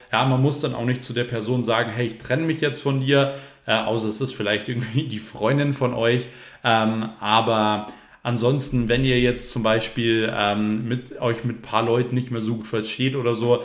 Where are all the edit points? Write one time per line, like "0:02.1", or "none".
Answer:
none